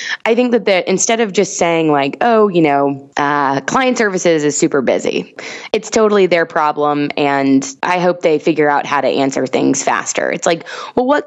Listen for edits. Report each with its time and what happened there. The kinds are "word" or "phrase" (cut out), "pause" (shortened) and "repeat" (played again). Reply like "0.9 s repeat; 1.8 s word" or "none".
none